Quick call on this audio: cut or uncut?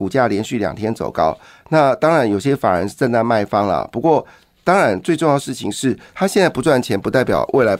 uncut